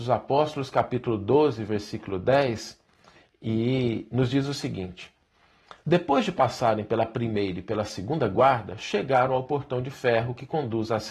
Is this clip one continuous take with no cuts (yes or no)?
yes